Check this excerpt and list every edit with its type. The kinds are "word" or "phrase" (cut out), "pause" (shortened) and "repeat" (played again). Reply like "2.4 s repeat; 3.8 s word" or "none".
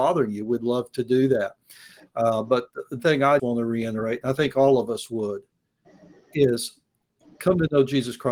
3.0 s word; 3.4 s word

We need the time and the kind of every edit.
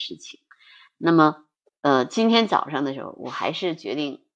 none

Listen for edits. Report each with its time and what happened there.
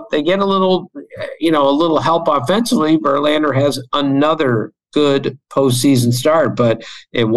none

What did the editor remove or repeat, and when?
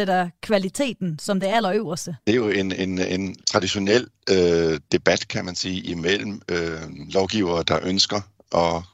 2.2 s pause; 3.4 s pause

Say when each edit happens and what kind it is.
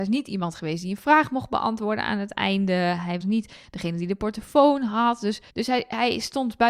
3.2 s word; 5.5 s pause

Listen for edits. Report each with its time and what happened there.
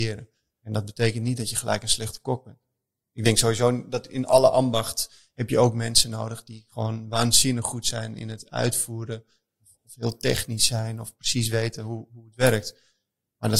none

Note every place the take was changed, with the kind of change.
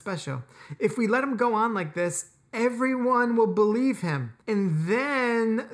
4.4 s pause

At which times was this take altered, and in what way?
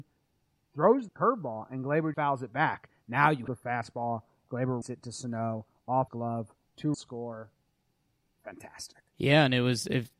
1.1 s word; 2.1 s word; 3.5 s phrase; 4.8 s word; 6.1 s word; 6.9 s word; 9.1 s pause

